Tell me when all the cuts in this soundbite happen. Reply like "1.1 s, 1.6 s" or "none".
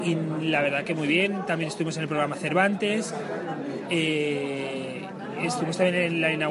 none